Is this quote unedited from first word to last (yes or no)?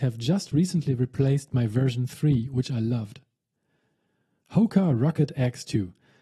yes